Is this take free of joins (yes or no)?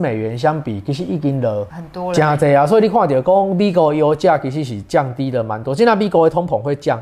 yes